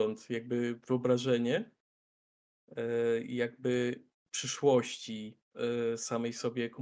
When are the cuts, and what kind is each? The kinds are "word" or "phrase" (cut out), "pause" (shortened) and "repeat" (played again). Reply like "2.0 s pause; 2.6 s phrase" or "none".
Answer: none

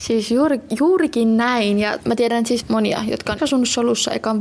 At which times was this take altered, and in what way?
2.0 s word; 2.6 s word; 3.4 s word

